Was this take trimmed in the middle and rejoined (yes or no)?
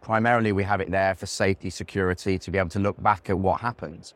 no